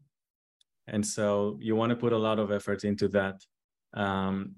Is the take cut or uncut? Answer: uncut